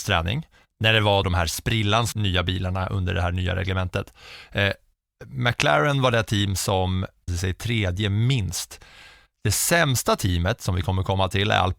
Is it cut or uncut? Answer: cut